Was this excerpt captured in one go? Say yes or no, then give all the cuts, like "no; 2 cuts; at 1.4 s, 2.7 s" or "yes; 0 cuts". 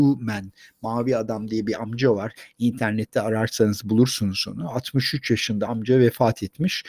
yes; 0 cuts